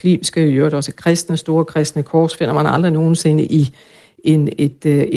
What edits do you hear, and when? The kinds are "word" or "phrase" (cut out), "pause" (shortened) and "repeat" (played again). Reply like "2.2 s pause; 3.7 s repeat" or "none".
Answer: none